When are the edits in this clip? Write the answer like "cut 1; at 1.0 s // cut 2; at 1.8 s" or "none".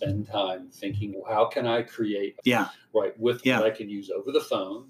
cut 1; at 1.1 s // cut 2; at 2.4 s // cut 3; at 3.4 s